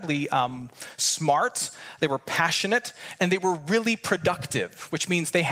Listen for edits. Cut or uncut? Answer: uncut